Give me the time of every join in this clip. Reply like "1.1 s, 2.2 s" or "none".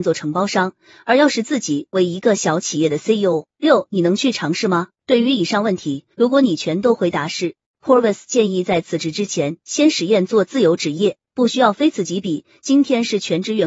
3.5 s, 4.9 s, 6.1 s, 11.3 s